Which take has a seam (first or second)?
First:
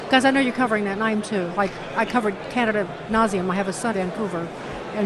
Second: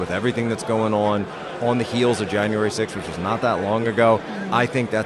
first